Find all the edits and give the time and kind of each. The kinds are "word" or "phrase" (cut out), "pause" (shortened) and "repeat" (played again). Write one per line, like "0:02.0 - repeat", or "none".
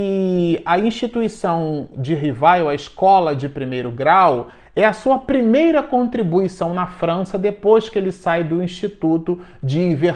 none